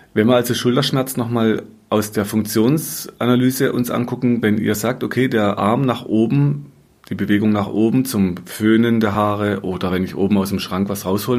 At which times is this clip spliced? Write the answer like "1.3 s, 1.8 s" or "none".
none